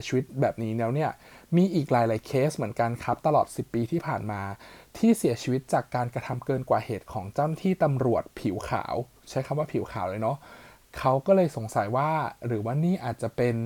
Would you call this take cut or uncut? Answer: uncut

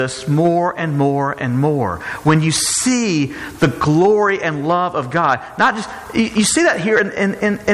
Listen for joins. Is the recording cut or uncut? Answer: uncut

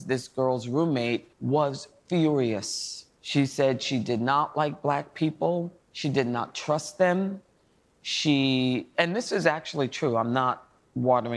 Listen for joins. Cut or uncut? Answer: cut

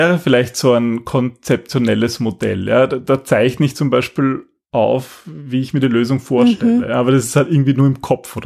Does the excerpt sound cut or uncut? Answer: uncut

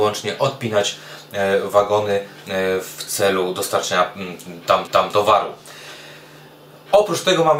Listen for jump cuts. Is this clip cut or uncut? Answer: cut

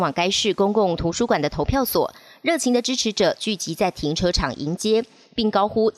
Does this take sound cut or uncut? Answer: uncut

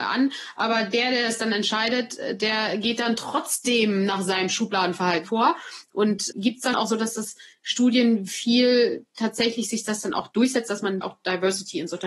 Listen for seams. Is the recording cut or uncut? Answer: cut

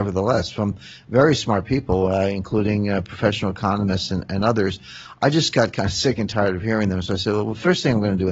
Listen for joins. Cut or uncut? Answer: uncut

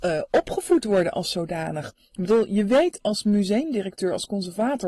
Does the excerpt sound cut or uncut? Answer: uncut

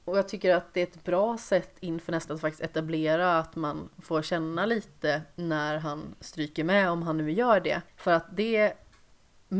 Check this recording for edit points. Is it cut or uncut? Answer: cut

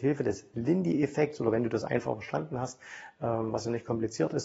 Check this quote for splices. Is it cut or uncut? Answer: uncut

